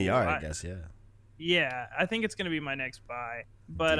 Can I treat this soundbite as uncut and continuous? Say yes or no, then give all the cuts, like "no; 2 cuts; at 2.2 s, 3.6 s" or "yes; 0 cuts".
yes; 0 cuts